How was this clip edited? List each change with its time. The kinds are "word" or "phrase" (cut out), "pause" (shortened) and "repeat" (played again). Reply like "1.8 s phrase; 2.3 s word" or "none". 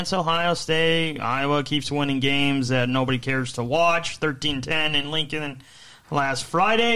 none